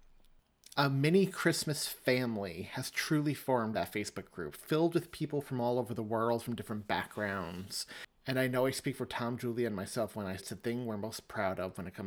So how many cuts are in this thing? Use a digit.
3